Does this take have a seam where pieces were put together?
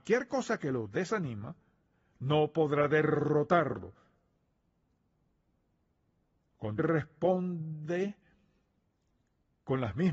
yes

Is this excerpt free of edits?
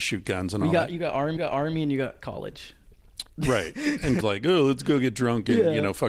no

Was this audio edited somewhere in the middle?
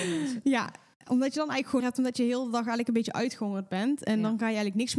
yes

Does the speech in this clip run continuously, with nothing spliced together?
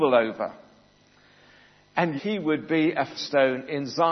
no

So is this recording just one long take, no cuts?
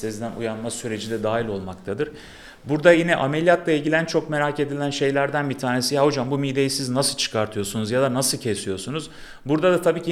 yes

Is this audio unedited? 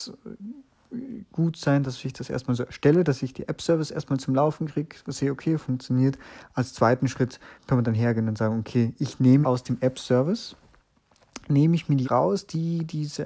no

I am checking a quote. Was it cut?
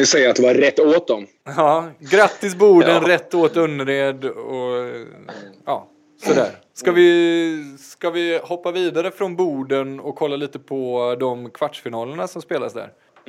no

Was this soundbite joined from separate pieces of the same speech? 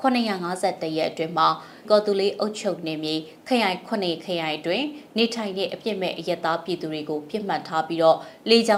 yes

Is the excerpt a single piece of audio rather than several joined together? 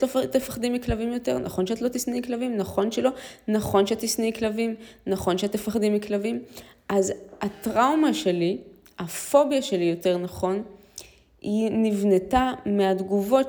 yes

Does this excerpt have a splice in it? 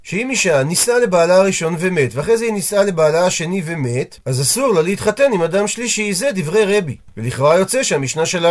yes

